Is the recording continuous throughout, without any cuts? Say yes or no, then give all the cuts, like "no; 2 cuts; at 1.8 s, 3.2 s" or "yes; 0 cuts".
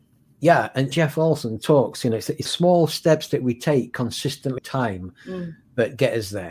no; 3 cuts; at 0.9 s, 2.4 s, 4.6 s